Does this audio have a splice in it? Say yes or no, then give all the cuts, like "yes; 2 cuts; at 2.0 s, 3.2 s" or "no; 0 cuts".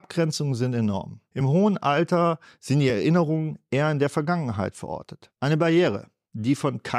no; 0 cuts